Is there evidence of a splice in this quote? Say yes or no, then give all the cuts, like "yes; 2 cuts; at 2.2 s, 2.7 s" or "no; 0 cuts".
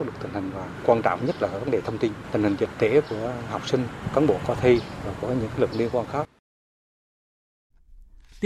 yes; 1 cut; at 5.7 s